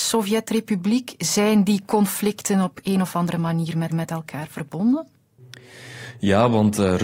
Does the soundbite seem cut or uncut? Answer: cut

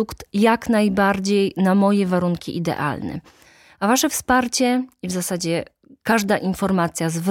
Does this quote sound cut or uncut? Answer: uncut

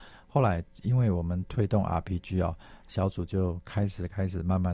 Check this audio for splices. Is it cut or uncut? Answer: uncut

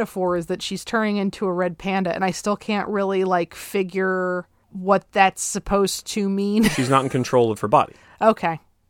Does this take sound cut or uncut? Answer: uncut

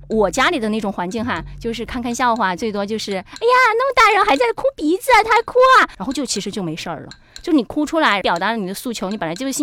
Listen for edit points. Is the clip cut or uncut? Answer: uncut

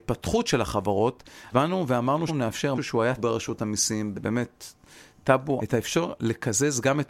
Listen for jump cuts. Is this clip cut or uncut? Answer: cut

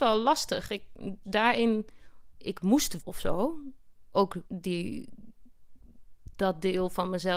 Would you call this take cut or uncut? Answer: cut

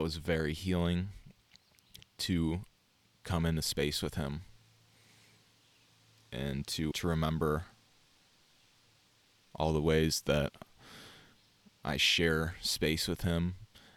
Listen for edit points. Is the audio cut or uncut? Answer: cut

